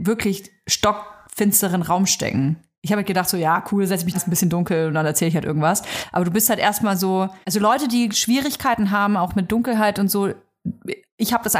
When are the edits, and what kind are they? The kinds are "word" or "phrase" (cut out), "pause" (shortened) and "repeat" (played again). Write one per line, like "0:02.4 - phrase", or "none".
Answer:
0:04.1 - phrase
0:07.4 - pause